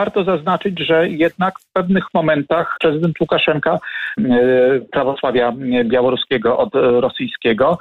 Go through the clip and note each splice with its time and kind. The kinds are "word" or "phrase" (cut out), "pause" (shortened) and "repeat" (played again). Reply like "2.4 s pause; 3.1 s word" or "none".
2.8 s word; 4.2 s phrase